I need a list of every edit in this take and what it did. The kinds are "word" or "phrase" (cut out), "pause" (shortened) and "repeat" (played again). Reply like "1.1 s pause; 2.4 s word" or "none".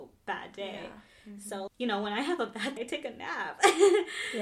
1.7 s word; 2.8 s word